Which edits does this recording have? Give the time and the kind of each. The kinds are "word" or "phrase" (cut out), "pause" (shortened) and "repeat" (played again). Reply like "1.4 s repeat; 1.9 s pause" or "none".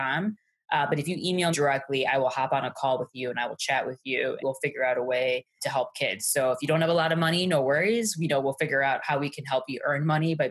1.5 s word; 4.4 s word; 5.6 s word

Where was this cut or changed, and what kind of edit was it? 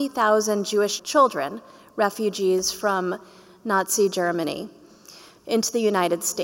1.0 s word

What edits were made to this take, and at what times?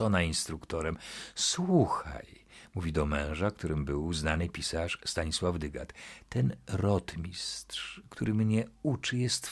none

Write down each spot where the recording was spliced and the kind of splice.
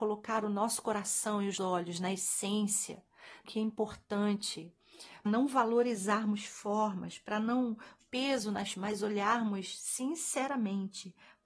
1.6 s word; 3.4 s word; 5.3 s word; 8.0 s word; 8.7 s word

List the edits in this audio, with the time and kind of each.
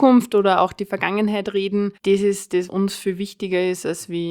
2.0 s pause; 2.7 s word

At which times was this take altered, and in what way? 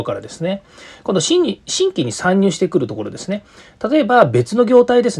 none

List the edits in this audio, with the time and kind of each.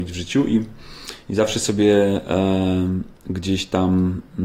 3.2 s pause

